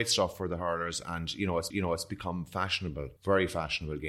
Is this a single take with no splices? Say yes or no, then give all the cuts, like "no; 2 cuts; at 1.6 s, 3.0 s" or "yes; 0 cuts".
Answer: no; 2 cuts; at 1.7 s, 3.2 s